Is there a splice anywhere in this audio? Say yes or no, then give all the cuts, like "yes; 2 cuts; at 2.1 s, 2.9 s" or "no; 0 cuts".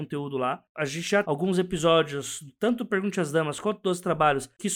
yes; 1 cut; at 1.2 s